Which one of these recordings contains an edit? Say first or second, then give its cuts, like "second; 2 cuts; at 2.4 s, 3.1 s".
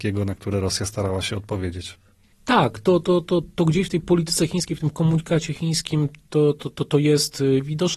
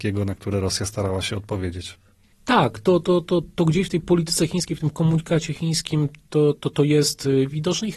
second; 1 cut; at 6.5 s